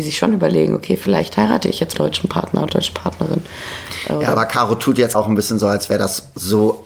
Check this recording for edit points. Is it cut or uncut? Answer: cut